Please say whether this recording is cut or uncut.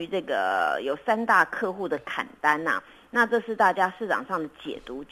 uncut